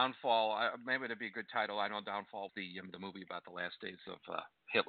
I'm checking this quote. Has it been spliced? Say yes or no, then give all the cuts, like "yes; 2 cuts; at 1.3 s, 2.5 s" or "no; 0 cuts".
yes; 1 cut; at 2.5 s